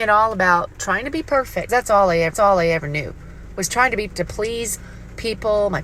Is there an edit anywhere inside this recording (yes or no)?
yes